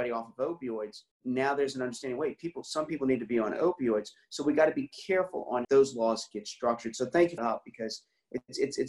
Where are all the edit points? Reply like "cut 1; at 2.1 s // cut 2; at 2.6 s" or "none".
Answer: cut 1; at 1.1 s // cut 2; at 5.6 s // cut 3; at 7.4 s